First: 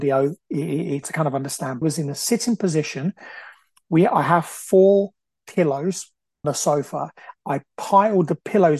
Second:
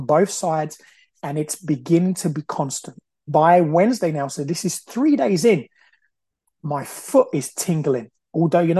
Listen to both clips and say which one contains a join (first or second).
first